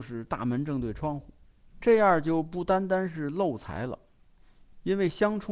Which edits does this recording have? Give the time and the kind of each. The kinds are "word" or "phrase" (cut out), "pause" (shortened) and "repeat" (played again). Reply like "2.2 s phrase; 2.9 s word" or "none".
1.7 s pause